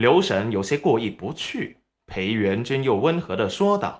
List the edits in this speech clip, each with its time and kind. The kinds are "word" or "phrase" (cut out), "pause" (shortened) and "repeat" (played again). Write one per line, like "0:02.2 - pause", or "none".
0:01.9 - pause